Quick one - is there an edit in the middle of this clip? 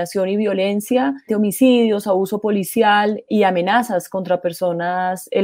yes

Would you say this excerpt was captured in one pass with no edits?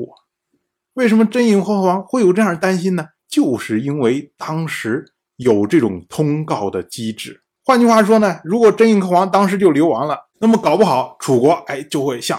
no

